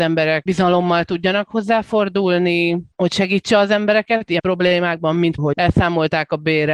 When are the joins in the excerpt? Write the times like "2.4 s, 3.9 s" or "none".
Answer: 4.4 s, 5.4 s